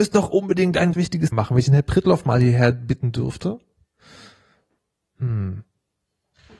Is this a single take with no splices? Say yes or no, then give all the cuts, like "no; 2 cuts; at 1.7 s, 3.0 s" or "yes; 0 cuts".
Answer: no; 2 cuts; at 0.9 s, 1.3 s